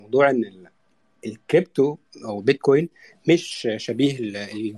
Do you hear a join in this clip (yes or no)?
no